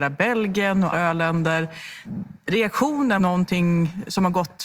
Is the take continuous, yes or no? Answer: no